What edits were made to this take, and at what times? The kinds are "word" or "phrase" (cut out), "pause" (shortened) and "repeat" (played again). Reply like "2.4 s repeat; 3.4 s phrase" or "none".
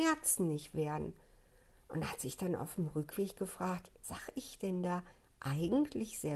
4.0 s word

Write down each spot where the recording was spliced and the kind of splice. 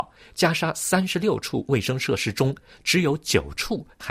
none

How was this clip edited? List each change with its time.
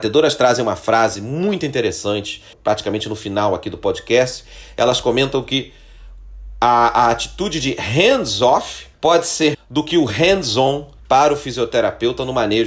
2.5 s pause; 8.9 s pause; 9.5 s word; 11.0 s pause

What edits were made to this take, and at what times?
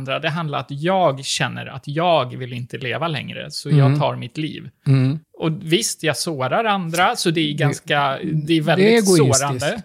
5.2 s pause

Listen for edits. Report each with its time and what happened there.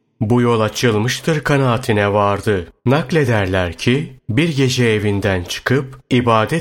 2.8 s pause

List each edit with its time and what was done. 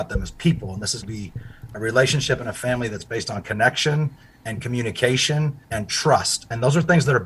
1.0 s word; 5.6 s pause

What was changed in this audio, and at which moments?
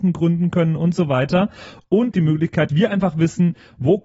2.1 s phrase; 2.7 s word

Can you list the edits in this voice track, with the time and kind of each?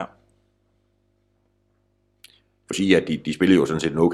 2.7 s phrase

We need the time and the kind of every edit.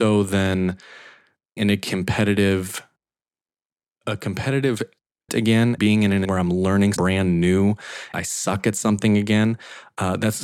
1.6 s word; 5.3 s word; 5.8 s word; 6.2 s word; 7.0 s word; 8.1 s word

